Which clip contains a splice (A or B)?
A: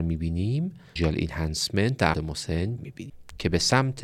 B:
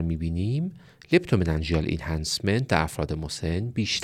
A